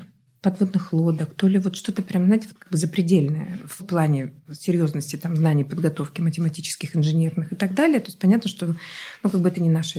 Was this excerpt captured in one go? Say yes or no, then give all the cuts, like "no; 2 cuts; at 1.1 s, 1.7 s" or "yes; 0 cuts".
no; 1 cut; at 3.8 s